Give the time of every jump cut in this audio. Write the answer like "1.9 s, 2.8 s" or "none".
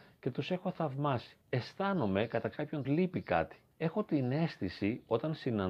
1.4 s, 2.8 s, 3.7 s